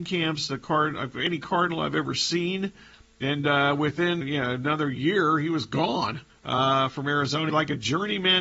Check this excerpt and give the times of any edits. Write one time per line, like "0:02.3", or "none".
0:04.2
0:06.3
0:07.5